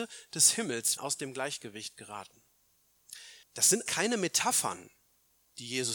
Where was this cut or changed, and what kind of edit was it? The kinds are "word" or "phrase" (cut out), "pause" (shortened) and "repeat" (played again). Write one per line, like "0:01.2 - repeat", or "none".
0:01.0 - word
0:03.4 - pause
0:03.9 - word